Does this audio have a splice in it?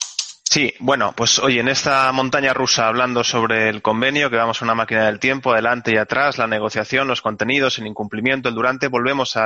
no; 0 cuts

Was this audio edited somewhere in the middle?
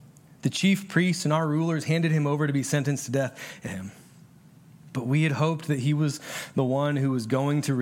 yes; 1 cut; at 3.7 s

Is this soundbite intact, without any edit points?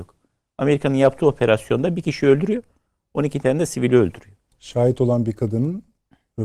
yes; 0 cuts

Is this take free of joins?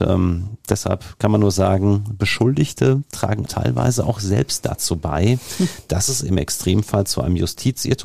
no; 1 cut; at 3.4 s

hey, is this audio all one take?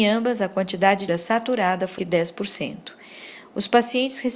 no; 2 cuts; at 1.1 s, 2.0 s

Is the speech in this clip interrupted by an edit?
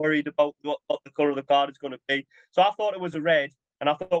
no; 0 cuts

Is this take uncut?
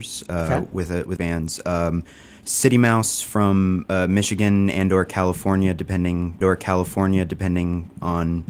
no; 2 cuts; at 1.2 s, 6.4 s

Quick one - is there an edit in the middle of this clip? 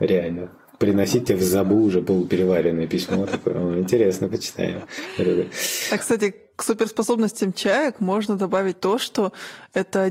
no; 0 cuts

